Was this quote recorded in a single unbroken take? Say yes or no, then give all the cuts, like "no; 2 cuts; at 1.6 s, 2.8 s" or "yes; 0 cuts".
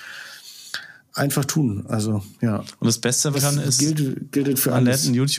no; 2 cuts; at 2.3 s, 3.3 s